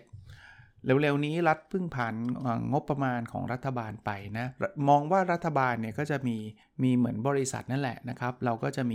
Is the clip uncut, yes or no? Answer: no